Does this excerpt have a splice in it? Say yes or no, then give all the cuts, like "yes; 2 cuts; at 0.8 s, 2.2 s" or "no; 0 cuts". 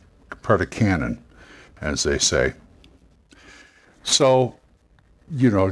no; 0 cuts